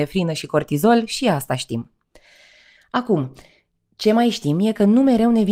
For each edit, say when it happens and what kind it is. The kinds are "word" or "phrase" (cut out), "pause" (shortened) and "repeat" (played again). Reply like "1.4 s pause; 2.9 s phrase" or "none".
none

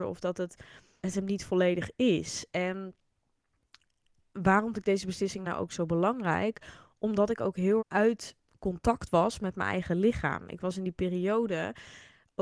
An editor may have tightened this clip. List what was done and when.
1.0 s word; 4.7 s word; 5.4 s word; 7.8 s word

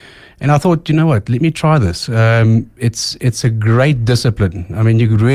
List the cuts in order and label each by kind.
none

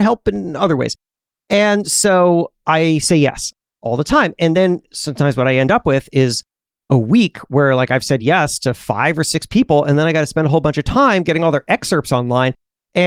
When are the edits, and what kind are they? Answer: none

